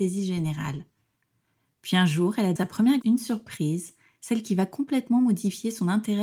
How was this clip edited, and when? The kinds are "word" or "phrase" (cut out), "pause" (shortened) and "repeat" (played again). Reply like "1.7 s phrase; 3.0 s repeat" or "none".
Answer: 2.6 s word; 3.0 s word